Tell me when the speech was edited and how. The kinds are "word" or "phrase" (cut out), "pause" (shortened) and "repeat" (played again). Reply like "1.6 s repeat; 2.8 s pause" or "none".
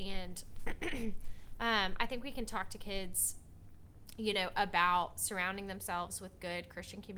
none